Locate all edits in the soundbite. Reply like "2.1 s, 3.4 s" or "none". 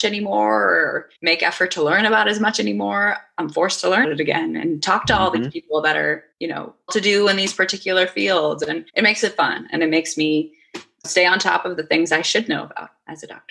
1.2 s, 4.0 s, 6.3 s, 6.9 s, 8.9 s, 11.0 s